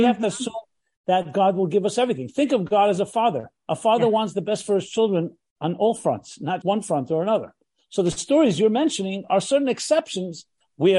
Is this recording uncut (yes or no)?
no